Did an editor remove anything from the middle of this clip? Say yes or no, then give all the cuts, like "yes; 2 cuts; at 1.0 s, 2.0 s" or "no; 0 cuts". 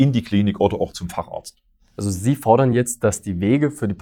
no; 0 cuts